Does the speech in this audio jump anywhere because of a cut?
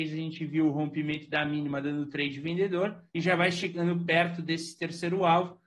yes; 1 cut; at 3.1 s

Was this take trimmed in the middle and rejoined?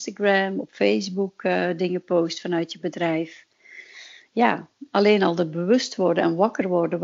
no; 0 cuts

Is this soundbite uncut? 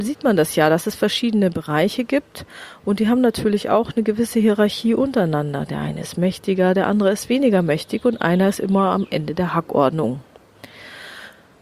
yes; 0 cuts

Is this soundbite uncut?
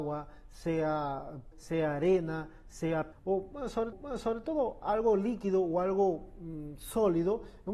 no; 3 cuts; at 1.5 s, 3.1 s, 3.9 s

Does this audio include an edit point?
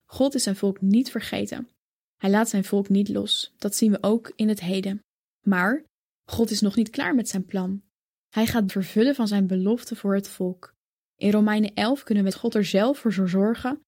yes; 2 cuts; at 8.7 s, 12.3 s

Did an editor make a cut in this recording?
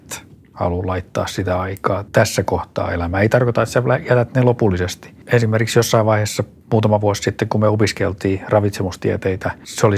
yes; 1 cut; at 2.1 s

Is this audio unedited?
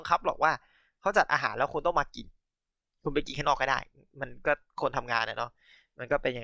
yes; 0 cuts

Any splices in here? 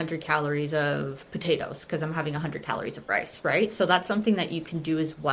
no; 0 cuts

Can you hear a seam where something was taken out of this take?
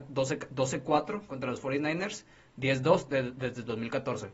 no; 0 cuts

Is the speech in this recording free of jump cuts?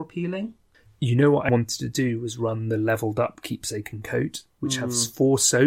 no; 1 cut; at 1.5 s

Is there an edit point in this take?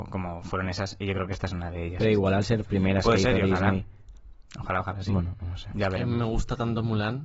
yes; 1 cut; at 2.7 s

